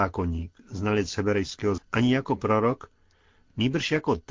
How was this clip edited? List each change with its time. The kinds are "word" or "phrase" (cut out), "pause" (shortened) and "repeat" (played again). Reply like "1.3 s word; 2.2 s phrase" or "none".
1.8 s word